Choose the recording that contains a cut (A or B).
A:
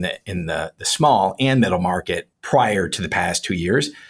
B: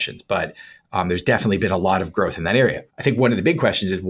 B